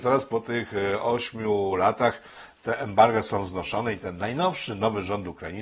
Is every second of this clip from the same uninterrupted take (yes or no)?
yes